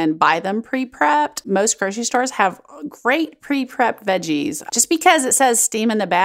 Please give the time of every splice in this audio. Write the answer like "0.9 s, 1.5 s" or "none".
none